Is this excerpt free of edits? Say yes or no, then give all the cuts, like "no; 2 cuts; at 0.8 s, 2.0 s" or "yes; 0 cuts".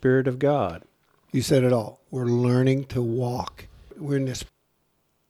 yes; 0 cuts